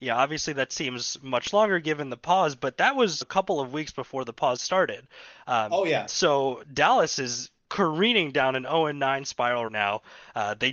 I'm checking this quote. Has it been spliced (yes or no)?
yes